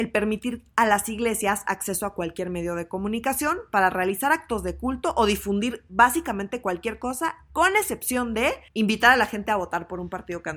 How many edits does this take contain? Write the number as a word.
one